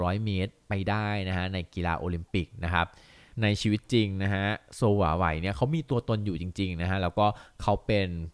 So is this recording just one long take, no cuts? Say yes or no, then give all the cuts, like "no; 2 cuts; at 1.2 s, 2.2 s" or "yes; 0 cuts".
yes; 0 cuts